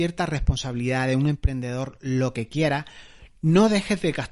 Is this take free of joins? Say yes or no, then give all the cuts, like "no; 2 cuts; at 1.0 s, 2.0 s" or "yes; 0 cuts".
yes; 0 cuts